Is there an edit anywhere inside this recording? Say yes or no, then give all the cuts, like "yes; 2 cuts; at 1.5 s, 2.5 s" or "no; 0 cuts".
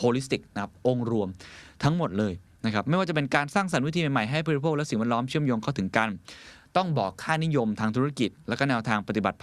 no; 0 cuts